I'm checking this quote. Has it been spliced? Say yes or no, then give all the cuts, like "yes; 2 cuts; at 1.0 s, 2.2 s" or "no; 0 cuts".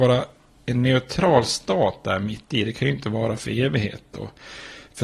no; 0 cuts